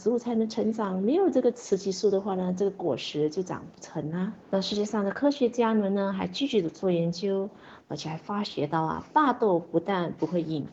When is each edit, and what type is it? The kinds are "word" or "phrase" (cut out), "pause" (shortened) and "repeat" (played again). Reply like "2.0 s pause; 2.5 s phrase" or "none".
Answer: 4.4 s pause